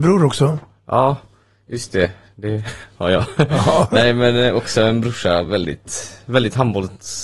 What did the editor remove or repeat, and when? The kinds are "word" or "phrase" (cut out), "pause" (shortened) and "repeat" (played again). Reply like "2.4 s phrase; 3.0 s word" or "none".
none